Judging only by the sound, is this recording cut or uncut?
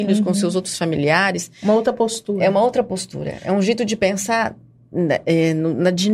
uncut